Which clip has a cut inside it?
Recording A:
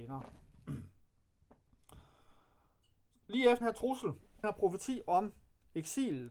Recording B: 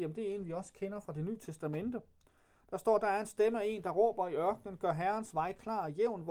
A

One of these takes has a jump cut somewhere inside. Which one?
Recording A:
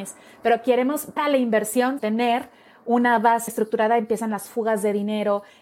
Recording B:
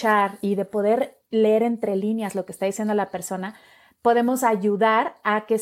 A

